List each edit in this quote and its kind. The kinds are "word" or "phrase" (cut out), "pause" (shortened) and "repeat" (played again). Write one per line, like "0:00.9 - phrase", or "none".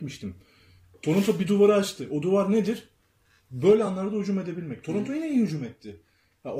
none